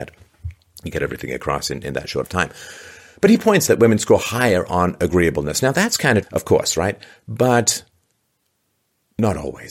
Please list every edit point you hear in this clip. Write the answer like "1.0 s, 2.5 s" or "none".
0.9 s, 2.2 s, 3.7 s, 6.2 s